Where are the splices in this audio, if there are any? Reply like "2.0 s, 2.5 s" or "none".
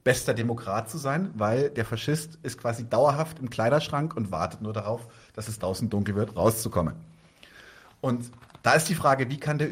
6.3 s